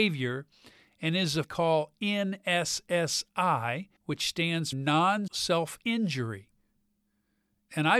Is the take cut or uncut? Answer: cut